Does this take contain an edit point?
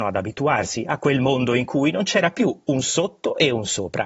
no; 0 cuts

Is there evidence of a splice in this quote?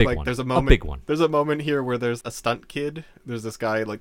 yes; 1 cut; at 2.2 s

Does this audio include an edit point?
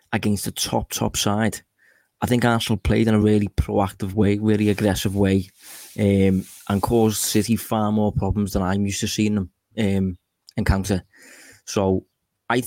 no; 0 cuts

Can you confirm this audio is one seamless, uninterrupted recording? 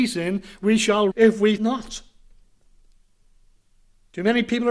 no; 2 cuts; at 1.1 s, 1.6 s

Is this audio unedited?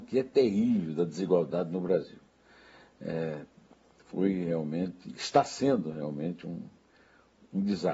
yes; 0 cuts

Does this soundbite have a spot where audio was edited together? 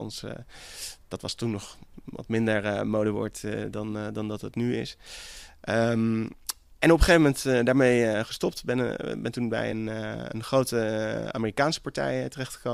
no; 0 cuts

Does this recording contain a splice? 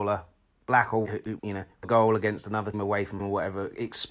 yes; 5 cuts; at 1.0 s, 1.4 s, 1.8 s, 2.7 s, 3.2 s

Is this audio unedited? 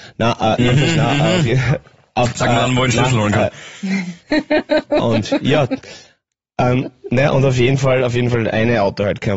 yes; 0 cuts

